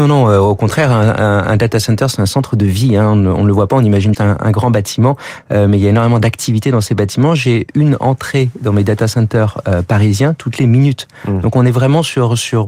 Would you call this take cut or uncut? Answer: cut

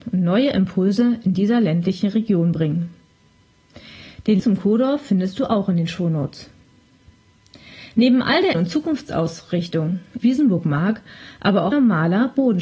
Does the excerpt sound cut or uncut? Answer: cut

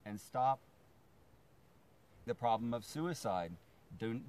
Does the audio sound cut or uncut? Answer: cut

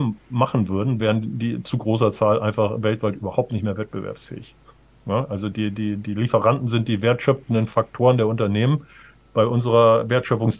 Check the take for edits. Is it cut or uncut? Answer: uncut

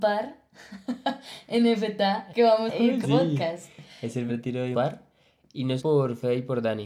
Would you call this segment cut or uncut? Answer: cut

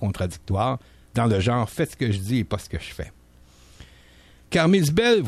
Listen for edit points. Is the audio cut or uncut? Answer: uncut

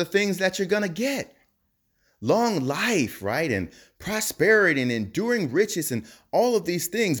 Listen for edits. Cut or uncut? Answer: uncut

